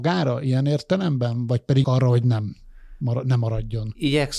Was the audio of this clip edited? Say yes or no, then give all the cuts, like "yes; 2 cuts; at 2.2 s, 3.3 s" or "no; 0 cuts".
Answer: yes; 1 cut; at 1.8 s